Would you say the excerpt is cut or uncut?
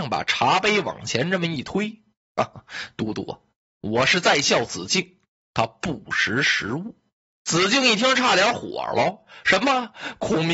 uncut